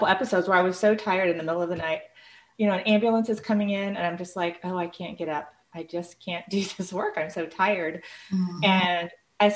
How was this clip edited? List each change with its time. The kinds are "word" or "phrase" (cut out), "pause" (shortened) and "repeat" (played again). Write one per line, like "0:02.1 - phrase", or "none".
none